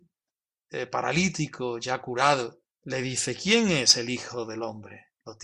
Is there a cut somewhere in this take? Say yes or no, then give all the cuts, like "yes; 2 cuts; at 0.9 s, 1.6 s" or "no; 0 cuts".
yes; 1 cut; at 2.7 s